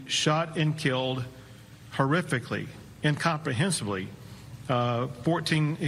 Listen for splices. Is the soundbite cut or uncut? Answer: uncut